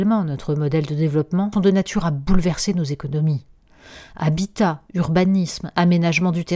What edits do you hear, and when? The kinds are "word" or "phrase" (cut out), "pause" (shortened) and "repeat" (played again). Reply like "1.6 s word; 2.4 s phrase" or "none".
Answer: 1.5 s word